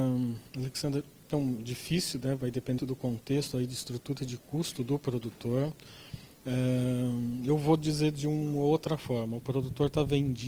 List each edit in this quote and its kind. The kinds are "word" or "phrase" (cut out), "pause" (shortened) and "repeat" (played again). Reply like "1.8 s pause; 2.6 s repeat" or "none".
1.3 s word; 2.8 s word